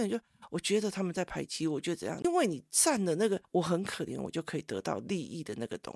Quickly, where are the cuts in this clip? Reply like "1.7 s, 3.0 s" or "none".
3.4 s